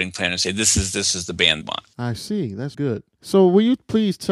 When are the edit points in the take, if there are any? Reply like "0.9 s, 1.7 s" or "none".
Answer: 1.6 s, 2.7 s